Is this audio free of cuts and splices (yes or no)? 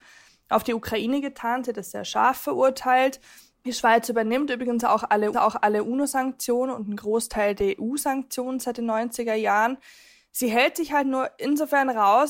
no